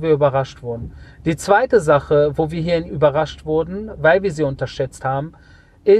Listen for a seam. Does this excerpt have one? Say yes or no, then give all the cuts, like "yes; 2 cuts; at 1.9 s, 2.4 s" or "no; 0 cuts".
yes; 1 cut; at 2.9 s